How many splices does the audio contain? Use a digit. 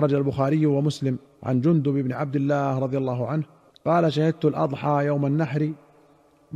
2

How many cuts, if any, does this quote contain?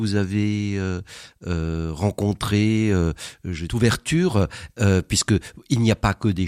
1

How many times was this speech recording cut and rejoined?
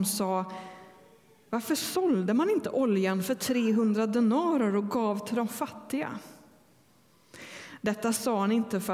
0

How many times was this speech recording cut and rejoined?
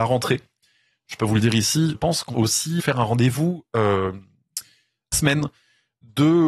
4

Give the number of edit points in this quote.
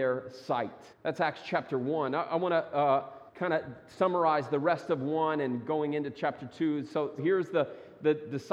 3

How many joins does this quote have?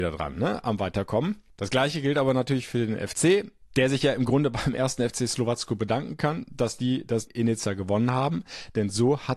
1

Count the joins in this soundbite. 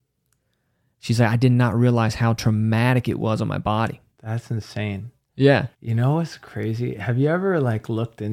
2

